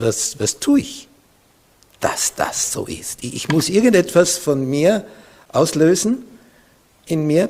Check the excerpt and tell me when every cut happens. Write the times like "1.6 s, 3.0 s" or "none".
none

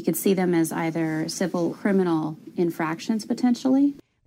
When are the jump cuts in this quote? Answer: 1.7 s

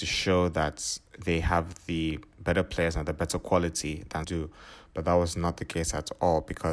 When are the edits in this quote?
4.2 s

